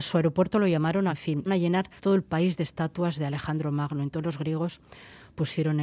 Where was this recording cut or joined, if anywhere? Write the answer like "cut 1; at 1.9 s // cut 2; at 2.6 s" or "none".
cut 1; at 1.1 s // cut 2; at 1.5 s // cut 3; at 2.0 s